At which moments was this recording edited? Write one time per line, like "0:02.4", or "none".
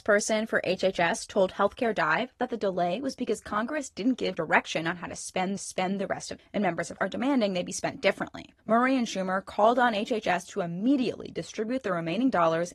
0:04.4
0:05.6
0:06.4
0:07.0
0:08.6

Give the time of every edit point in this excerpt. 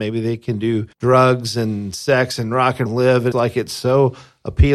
0:00.9
0:02.9
0:03.3

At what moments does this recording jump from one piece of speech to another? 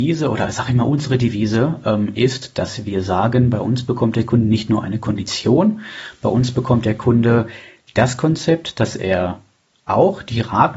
none

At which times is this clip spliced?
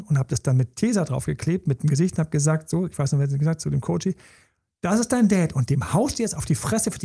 none

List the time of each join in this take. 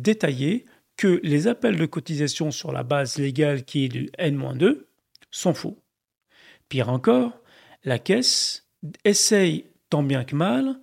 none

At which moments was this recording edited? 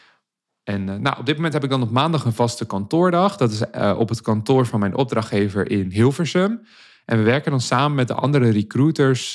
none

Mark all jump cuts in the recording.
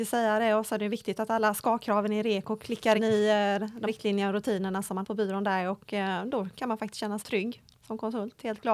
0:03.0
0:03.9
0:05.0
0:07.2

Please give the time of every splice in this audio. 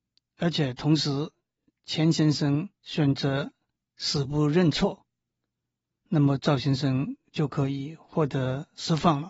0:02.8

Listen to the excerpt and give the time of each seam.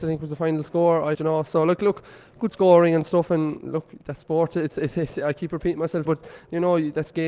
0:01.1
0:06.1

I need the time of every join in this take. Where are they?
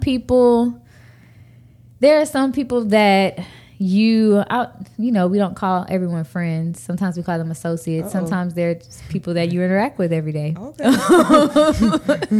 none

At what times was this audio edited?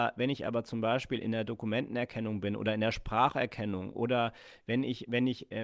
none

